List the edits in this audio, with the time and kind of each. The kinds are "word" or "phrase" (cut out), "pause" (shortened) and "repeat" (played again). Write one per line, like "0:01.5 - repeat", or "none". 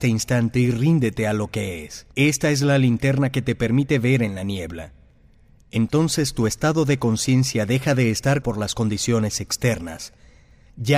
0:02.1 - pause
0:08.4 - word